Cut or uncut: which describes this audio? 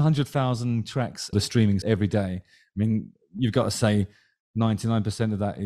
cut